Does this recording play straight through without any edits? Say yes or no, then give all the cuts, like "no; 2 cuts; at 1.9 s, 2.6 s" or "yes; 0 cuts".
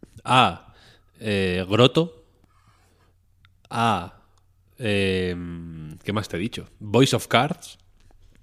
yes; 0 cuts